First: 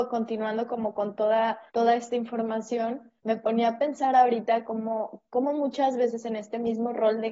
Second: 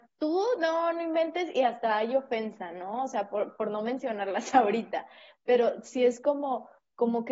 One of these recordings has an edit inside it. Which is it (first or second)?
first